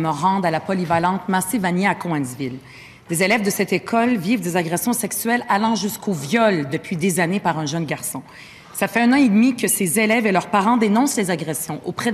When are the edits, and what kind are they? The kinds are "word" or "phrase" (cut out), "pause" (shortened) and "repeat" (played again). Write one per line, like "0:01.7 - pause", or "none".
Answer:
none